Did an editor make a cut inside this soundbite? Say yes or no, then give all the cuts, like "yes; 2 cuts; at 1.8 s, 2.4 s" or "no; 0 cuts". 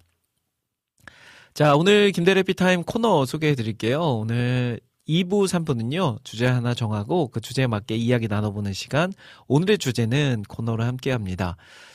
no; 0 cuts